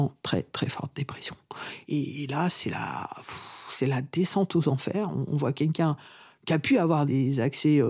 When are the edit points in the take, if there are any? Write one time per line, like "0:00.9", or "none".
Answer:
none